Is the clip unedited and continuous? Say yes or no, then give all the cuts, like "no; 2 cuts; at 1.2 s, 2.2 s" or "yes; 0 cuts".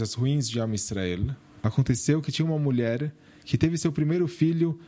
yes; 0 cuts